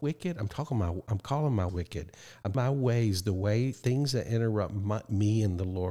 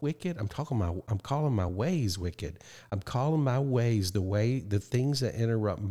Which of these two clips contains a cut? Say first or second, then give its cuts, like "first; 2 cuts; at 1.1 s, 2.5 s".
first; 3 cuts; at 1.7 s, 2.5 s, 3.7 s